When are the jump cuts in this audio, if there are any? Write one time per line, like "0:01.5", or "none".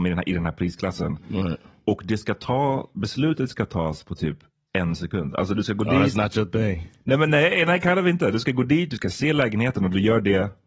none